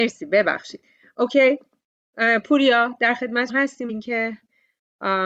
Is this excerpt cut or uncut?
cut